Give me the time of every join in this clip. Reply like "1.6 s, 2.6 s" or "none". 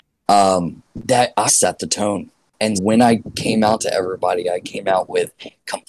1.5 s, 2.7 s